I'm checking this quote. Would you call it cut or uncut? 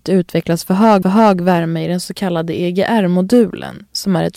cut